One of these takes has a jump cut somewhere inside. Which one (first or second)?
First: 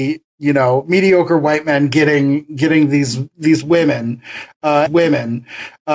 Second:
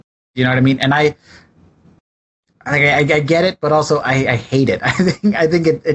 first